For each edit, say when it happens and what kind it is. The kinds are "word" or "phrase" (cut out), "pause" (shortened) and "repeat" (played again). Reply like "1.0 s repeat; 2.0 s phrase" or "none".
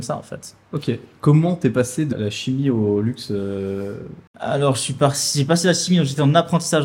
2.1 s word